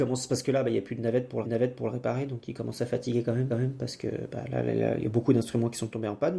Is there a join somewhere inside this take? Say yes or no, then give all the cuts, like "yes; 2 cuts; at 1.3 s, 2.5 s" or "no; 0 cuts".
yes; 2 cuts; at 1.4 s, 3.5 s